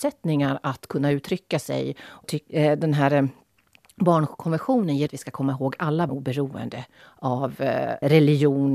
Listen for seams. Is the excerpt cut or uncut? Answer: cut